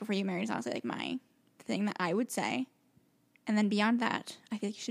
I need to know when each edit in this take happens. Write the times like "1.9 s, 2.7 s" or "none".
none